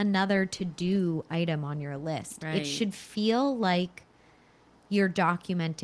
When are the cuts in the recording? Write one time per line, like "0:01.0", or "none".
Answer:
none

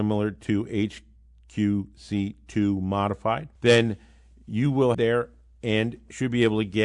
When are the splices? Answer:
0:03.6
0:04.9

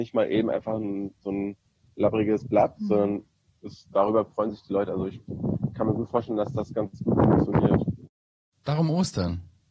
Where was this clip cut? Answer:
0:01.7

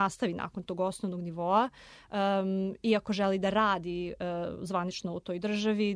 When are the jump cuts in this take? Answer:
none

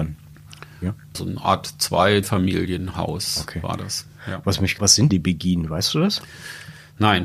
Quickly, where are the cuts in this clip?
0:01.1
0:02.2
0:04.8
0:05.1

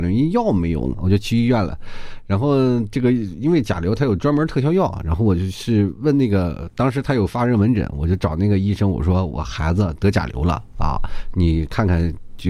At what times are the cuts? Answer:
0:00.9

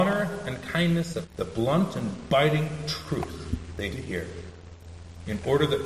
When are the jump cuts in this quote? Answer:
0:01.2
0:03.9

